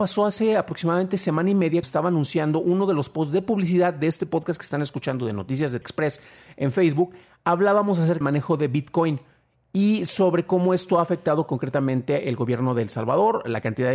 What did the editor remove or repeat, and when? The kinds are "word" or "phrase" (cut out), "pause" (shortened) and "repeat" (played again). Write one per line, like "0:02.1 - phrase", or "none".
0:01.8 - word
0:05.8 - word
0:08.2 - word